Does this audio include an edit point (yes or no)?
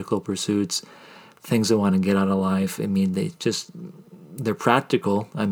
no